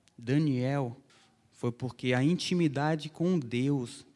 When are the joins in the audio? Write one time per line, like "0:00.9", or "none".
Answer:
none